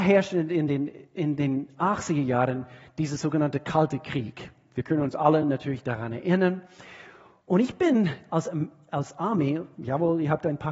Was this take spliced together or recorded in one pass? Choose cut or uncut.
uncut